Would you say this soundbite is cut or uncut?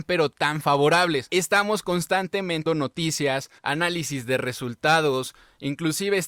cut